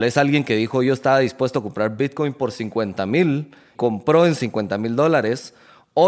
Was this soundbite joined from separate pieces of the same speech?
yes; 1 cut; at 3.7 s

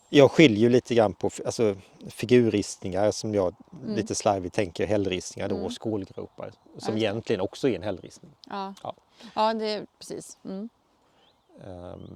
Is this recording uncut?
yes; 0 cuts

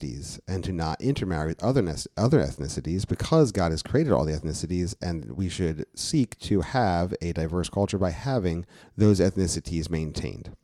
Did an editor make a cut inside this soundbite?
yes; 1 cut; at 8.8 s

